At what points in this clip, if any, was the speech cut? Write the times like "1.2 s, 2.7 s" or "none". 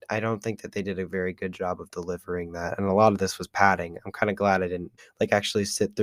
5.0 s